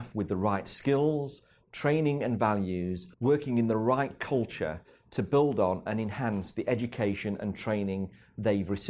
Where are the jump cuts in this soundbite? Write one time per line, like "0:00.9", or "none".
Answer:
0:03.1